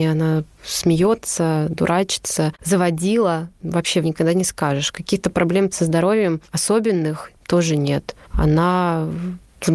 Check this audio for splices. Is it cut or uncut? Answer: cut